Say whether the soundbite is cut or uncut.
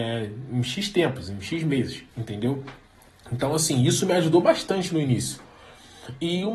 cut